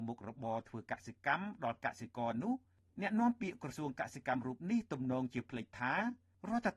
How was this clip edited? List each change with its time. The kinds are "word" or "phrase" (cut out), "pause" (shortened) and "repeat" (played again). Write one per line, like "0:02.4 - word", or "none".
none